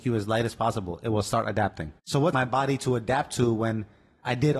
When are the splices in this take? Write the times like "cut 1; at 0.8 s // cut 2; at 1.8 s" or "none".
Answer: cut 1; at 2.0 s // cut 2; at 2.3 s